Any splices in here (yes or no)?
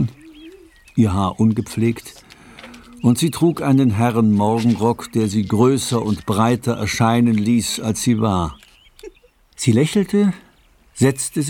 no